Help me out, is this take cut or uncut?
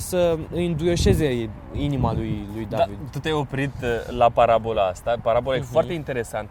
uncut